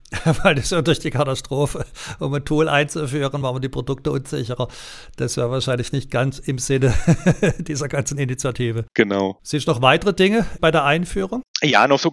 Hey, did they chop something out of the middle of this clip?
no; 0 cuts

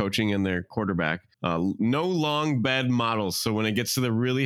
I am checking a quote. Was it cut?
yes; 1 cut; at 1.3 s

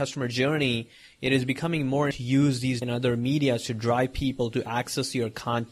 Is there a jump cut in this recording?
yes; 2 cuts; at 2.1 s, 2.8 s

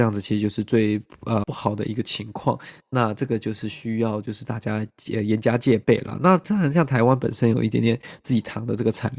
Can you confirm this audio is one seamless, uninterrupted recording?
no; 1 cut; at 1.4 s

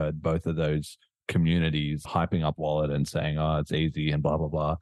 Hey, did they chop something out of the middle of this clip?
yes; 2 cuts; at 2.0 s, 2.6 s

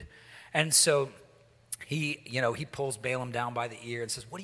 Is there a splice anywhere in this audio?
no; 0 cuts

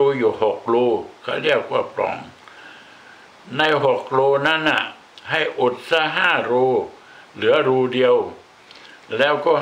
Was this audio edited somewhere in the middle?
no; 0 cuts

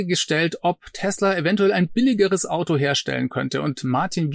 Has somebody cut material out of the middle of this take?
no; 0 cuts

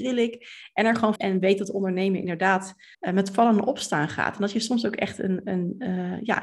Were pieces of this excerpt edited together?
yes; 2 cuts; at 1.2 s, 2.9 s

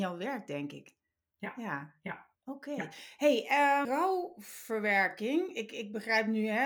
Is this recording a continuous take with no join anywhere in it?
no; 2 cuts; at 2.3 s, 3.8 s

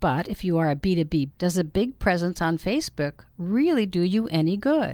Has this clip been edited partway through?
yes; 1 cut; at 1.3 s

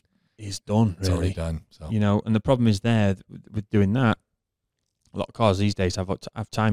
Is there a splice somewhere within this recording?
no; 0 cuts

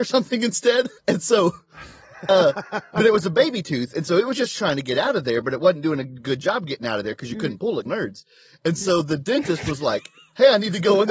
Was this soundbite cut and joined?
yes; 2 cuts; at 1.0 s, 7.8 s

